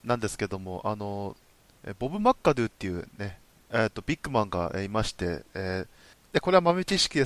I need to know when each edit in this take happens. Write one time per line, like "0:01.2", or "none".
none